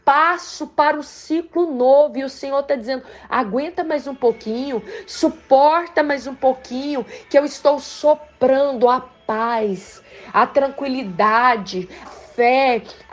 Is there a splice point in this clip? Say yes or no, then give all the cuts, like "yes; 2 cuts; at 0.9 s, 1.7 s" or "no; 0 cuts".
yes; 1 cut; at 12.0 s